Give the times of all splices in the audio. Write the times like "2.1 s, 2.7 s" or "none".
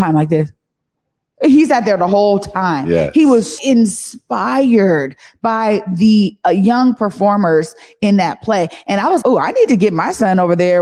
3.6 s, 6.4 s, 9.2 s